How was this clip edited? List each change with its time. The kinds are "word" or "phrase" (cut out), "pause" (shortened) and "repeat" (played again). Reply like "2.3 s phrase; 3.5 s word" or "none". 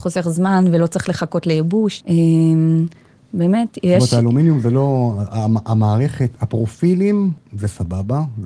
none

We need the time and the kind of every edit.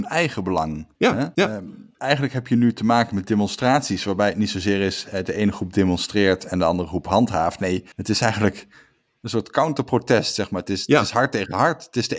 0.9 s pause; 1.3 s pause; 1.9 s pause; 7.9 s pause

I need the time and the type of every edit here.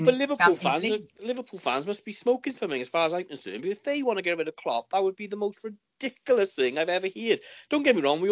1.1 s pause

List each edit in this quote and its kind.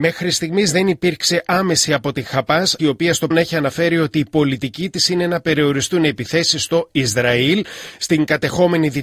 1.9 s word; 2.8 s word; 3.3 s word

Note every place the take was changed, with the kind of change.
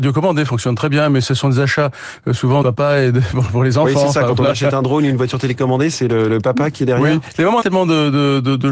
2.6 s phrase; 7.6 s phrase

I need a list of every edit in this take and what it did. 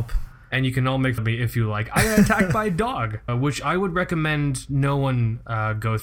1.2 s word; 3.3 s word

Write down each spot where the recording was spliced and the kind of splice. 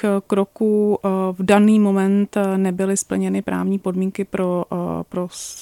none

